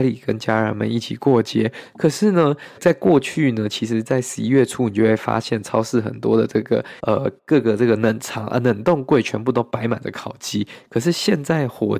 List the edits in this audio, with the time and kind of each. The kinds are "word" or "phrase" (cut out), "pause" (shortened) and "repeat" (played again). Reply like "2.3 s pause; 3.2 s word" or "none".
2.8 s word; 7.0 s pause

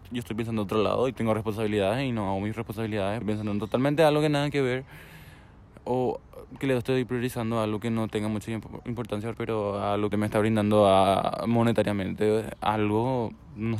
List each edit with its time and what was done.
1.1 s word; 3.2 s phrase; 6.5 s pause; 9.3 s word; 10.1 s phrase

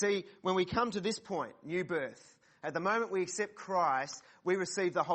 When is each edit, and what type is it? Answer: none

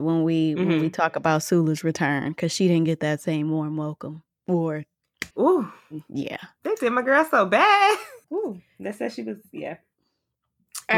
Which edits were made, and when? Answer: 5.3 s pause; 8.2 s pause

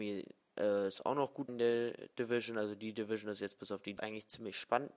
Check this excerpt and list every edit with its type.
1.5 s word; 4.0 s word

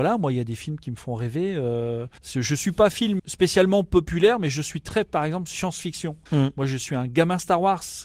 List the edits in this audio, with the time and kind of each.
2.2 s pause; 3.2 s word; 6.3 s pause

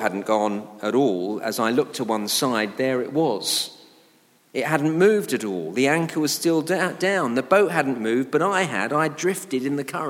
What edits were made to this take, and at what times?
none

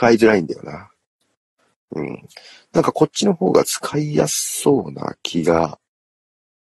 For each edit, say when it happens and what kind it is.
none

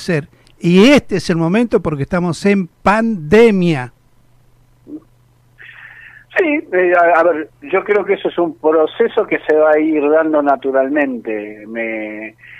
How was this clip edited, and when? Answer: none

